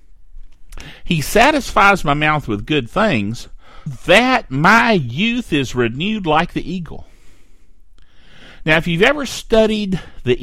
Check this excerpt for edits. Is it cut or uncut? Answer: cut